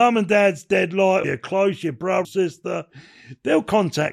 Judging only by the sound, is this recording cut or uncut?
cut